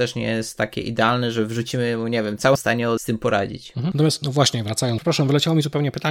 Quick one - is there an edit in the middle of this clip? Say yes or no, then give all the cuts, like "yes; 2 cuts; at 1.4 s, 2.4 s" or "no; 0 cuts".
yes; 2 cuts; at 2.6 s, 3.0 s